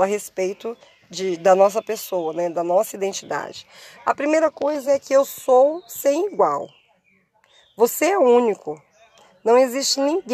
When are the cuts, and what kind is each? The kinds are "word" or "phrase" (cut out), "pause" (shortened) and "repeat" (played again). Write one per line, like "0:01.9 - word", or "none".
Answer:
none